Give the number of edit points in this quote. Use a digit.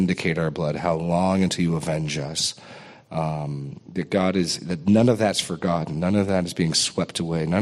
0